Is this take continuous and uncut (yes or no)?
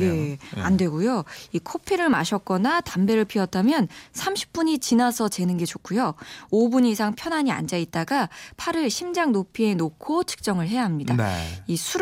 yes